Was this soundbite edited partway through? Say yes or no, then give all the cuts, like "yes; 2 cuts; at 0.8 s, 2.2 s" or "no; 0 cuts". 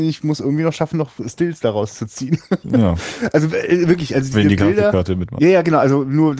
no; 0 cuts